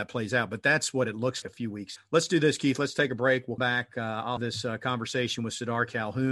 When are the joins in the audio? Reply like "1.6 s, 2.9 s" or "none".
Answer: 1.4 s, 2.0 s, 3.6 s, 4.4 s